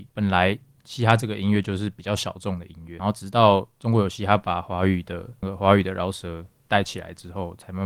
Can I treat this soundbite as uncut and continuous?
yes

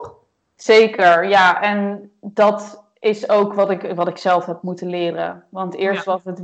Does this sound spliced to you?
no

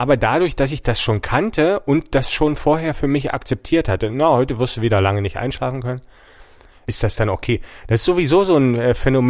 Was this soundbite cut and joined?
no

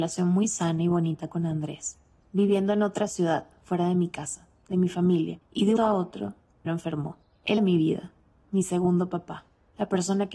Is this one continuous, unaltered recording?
no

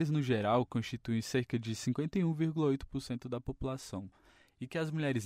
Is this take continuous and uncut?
yes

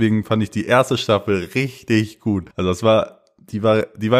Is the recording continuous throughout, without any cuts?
no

